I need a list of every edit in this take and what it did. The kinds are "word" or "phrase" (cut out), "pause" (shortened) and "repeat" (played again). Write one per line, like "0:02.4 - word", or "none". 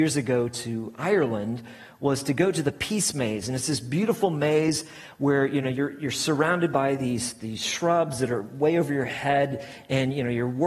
none